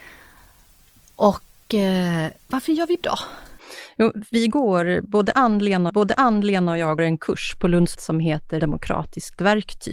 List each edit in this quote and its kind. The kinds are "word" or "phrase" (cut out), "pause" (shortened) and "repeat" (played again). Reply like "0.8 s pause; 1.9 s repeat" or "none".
2.4 s pause; 3.0 s word; 5.9 s repeat; 7.0 s word; 7.9 s word; 8.6 s phrase

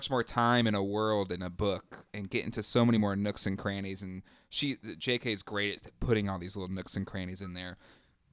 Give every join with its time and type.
none

